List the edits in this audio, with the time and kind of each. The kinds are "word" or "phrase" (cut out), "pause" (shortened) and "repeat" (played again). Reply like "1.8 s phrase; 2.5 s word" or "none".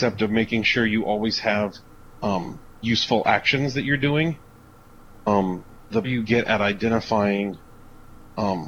6.0 s word